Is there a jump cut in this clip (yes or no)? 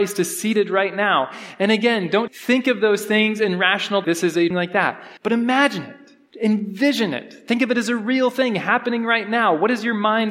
yes